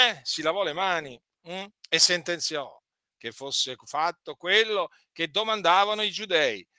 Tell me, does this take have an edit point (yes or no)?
no